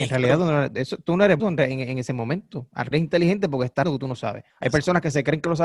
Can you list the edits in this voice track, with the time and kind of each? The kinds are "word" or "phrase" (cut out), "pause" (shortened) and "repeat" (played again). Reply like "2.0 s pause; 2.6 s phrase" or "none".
1.4 s word; 2.9 s word; 3.8 s word; 4.5 s pause